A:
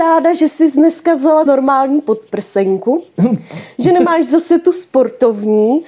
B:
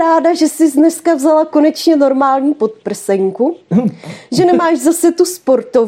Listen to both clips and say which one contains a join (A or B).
A